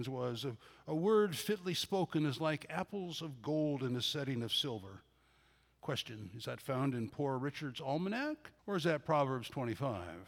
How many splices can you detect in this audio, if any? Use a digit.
1